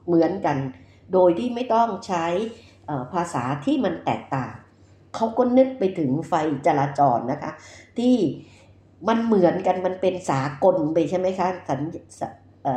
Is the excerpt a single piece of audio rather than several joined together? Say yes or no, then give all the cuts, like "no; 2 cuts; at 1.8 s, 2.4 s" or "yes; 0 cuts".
yes; 0 cuts